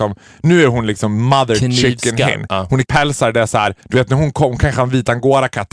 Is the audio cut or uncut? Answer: cut